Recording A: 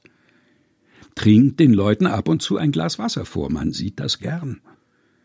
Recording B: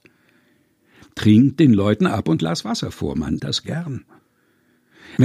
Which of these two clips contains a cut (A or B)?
B